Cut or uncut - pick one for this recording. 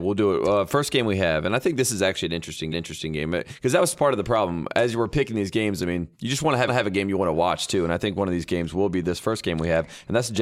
cut